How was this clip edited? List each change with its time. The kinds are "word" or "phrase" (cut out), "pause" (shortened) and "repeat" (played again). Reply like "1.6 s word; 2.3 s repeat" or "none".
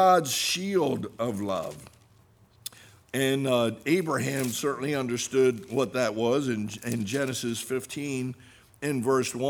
none